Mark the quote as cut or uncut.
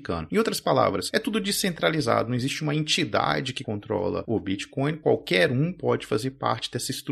uncut